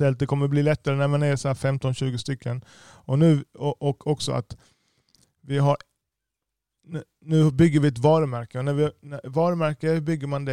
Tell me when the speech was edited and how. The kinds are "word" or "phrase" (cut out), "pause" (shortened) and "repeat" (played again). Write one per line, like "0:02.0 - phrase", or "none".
none